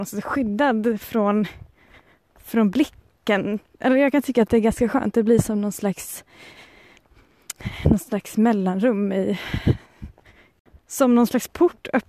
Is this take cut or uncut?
uncut